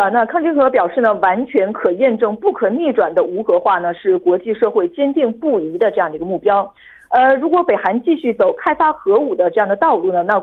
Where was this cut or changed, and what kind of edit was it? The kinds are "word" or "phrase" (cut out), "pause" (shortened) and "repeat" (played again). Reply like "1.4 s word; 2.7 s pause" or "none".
none